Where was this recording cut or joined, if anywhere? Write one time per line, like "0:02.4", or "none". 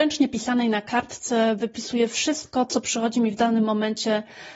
none